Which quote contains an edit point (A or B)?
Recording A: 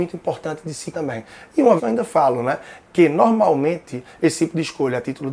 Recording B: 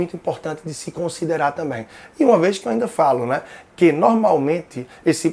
A